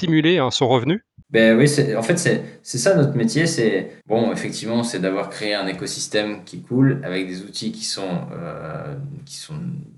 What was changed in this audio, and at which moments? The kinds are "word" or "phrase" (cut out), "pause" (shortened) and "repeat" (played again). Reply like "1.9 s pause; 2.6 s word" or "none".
1.2 s pause; 4.0 s pause